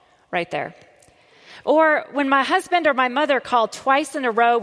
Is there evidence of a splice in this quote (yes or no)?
no